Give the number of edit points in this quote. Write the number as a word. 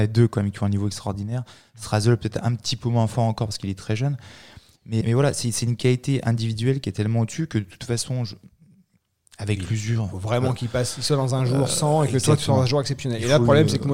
one